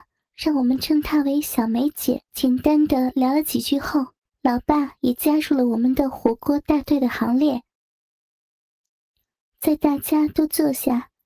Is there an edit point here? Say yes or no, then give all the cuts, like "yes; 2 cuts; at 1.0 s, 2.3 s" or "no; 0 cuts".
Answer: yes; 2 cuts; at 2.3 s, 4.3 s